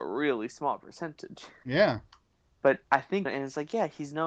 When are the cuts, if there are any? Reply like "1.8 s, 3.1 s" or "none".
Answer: 2.8 s, 3.2 s

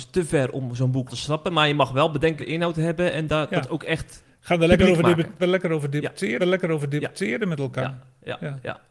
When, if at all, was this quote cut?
1.1 s, 2.4 s, 5.4 s, 6.4 s

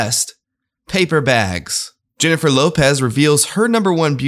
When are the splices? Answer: none

